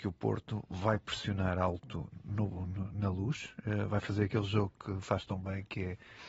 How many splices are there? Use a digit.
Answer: 0